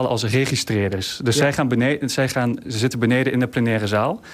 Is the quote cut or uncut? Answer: uncut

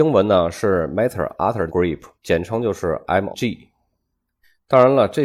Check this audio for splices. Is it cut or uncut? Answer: cut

